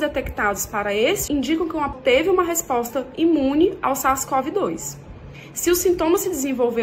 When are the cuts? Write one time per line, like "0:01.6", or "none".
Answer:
0:01.3
0:01.9